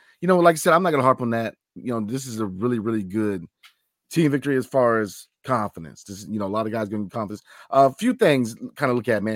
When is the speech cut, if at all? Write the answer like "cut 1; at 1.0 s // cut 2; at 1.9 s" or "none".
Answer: none